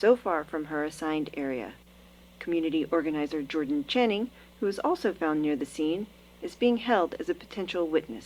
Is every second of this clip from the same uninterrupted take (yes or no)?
yes